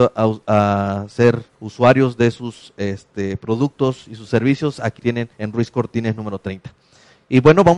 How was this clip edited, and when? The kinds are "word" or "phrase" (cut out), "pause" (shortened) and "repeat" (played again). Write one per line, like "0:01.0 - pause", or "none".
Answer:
0:01.5 - pause
0:05.0 - word
0:05.3 - pause